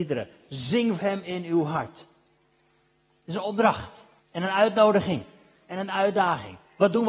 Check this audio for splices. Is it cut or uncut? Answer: cut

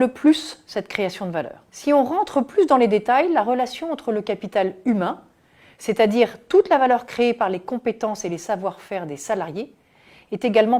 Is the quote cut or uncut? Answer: cut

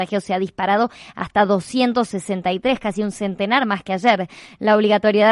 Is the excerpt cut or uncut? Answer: uncut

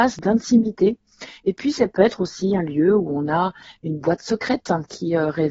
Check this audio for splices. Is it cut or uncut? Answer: uncut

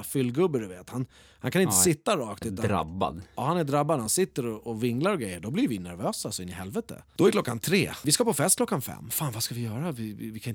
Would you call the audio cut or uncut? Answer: uncut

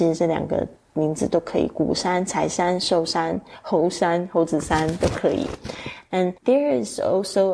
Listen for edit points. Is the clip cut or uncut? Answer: cut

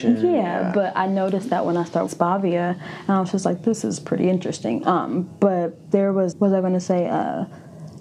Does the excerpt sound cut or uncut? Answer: cut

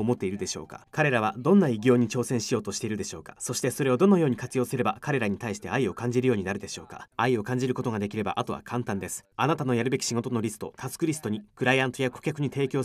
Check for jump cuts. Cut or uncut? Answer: cut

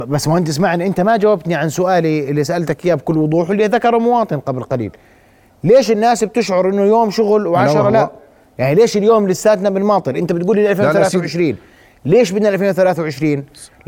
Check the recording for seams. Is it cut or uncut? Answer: uncut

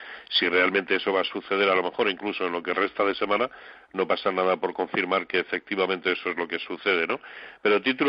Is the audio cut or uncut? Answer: uncut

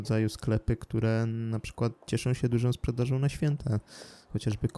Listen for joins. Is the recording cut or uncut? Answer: uncut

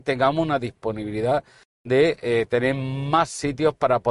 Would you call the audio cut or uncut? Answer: uncut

